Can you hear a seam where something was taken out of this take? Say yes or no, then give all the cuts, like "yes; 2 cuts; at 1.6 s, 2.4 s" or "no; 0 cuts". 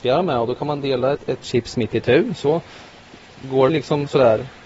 yes; 2 cuts; at 1.1 s, 3.7 s